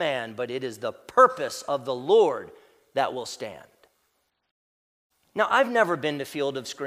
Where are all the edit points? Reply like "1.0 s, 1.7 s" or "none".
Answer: none